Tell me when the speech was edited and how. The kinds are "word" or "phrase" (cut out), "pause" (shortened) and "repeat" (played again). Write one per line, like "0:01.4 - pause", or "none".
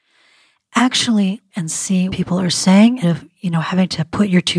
0:01.5 - word
0:02.1 - word
0:03.0 - word